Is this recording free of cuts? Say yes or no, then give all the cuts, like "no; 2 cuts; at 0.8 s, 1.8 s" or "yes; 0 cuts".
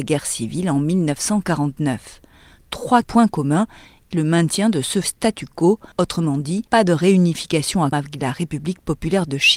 no; 6 cuts; at 3.0 s, 4.1 s, 5.0 s, 5.9 s, 6.7 s, 7.9 s